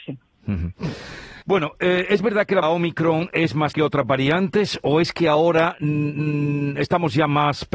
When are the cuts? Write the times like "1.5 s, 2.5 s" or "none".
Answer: 1.4 s, 2.6 s, 3.7 s